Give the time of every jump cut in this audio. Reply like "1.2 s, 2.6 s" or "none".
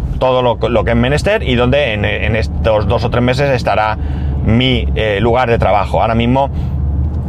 none